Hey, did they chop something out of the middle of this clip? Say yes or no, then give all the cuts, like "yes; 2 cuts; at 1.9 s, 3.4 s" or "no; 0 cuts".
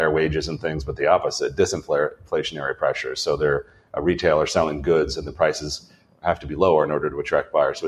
no; 0 cuts